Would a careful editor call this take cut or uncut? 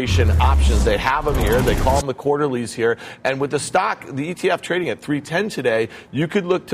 uncut